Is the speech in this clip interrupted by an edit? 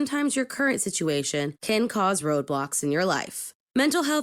no; 0 cuts

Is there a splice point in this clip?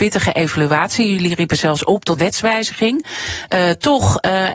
yes; 1 cut; at 2.2 s

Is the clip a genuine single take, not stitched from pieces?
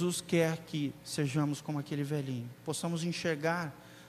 yes; 0 cuts

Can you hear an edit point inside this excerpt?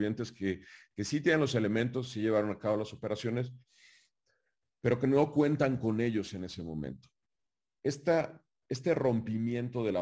no; 0 cuts

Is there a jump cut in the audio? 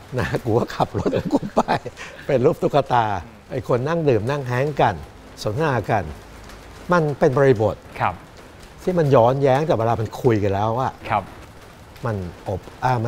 yes; 1 cut; at 3.4 s

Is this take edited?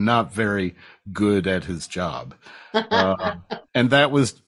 no; 0 cuts

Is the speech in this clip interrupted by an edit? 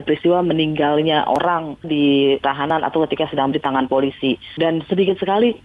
yes; 2 cuts; at 1.8 s, 3.5 s

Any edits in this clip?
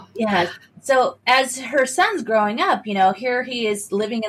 no; 0 cuts

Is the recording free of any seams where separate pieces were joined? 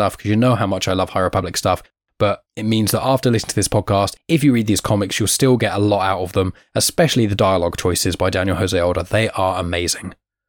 yes; 0 cuts

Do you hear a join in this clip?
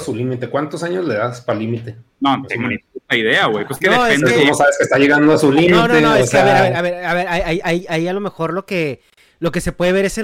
no; 0 cuts

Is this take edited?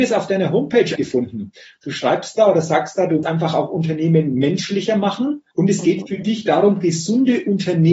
yes; 3 cuts; at 1.0 s, 3.2 s, 5.5 s

